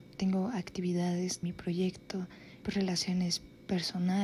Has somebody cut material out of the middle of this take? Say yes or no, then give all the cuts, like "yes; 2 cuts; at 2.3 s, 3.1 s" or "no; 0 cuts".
yes; 2 cuts; at 1.4 s, 2.6 s